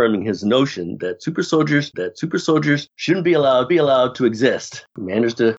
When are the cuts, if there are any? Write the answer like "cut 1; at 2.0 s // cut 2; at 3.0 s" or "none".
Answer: cut 1; at 1.9 s // cut 2; at 3.7 s